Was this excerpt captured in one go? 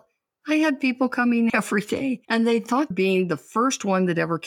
no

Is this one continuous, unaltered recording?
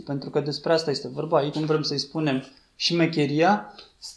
no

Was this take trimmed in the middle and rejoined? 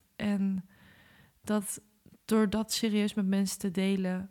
no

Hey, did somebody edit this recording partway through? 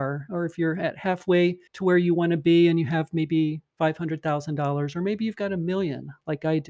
yes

